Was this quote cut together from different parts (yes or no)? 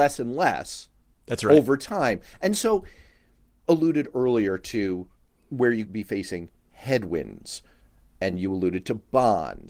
yes